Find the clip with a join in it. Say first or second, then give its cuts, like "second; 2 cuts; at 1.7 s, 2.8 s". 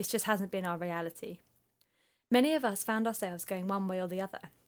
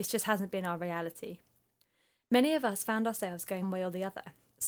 second; 1 cut; at 3.6 s